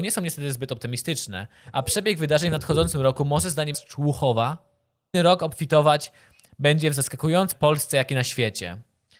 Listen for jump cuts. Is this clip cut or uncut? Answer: cut